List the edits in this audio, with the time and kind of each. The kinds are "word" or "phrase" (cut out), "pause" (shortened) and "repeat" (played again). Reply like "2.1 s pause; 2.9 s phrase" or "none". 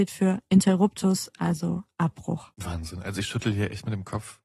2.5 s pause